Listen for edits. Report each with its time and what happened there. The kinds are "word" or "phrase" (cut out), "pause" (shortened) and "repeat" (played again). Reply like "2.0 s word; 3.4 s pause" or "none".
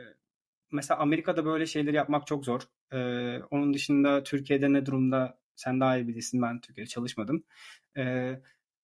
none